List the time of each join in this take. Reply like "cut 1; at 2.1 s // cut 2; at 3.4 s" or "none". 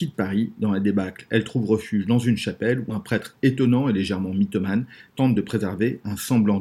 none